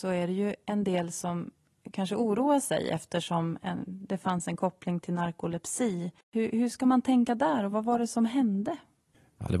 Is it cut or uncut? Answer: cut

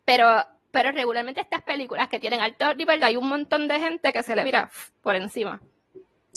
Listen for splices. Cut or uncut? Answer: cut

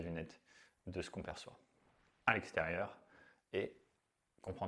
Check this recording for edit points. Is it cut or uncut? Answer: uncut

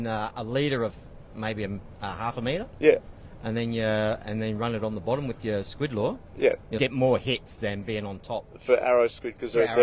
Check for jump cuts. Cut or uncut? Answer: cut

